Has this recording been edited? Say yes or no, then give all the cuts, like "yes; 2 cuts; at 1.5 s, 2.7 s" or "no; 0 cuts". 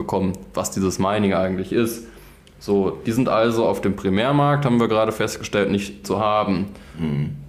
yes; 1 cut; at 6.0 s